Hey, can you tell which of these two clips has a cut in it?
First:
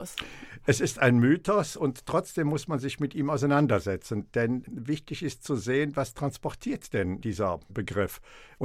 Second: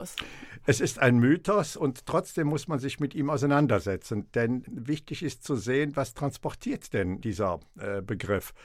first; 1 cut; at 7.7 s

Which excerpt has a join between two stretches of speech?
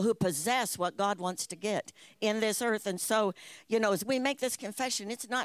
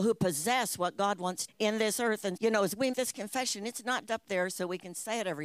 second; 4 cuts; at 1.5 s, 2.4 s, 2.9 s, 4.1 s

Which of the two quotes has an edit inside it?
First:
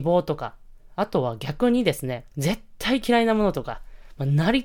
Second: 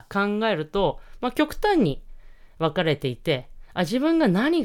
first; 1 cut; at 2.3 s

